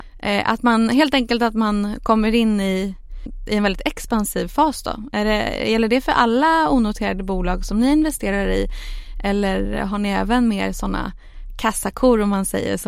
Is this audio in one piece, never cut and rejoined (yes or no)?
yes